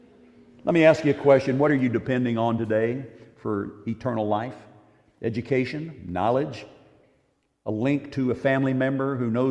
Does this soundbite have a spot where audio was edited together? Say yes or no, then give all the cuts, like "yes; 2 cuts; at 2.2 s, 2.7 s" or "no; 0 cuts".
no; 0 cuts